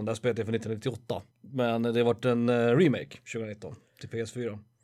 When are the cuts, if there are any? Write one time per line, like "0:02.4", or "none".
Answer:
0:01.3

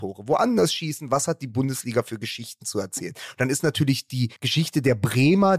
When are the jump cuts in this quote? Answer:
0:04.4

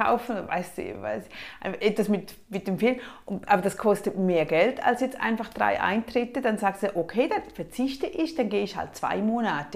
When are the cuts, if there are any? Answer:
none

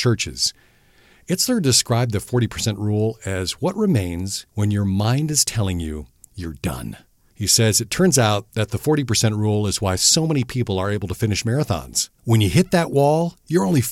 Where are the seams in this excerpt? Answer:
0:04.5

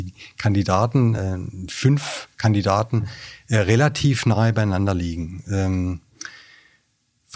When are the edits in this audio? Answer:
none

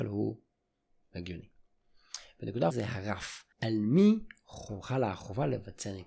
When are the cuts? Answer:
0:02.7
0:03.5

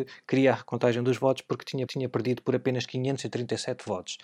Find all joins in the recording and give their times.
0:01.9

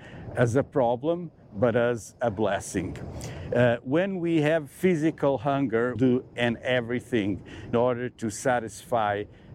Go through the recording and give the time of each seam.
0:06.0
0:06.3
0:07.7

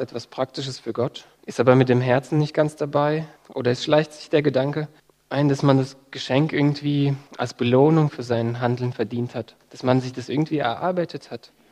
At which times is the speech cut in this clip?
0:01.4
0:03.4
0:05.0
0:07.3

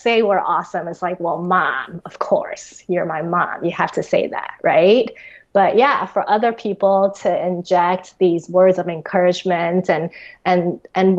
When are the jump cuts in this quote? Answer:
none

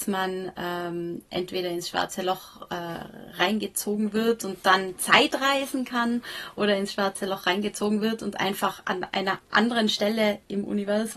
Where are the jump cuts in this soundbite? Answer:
none

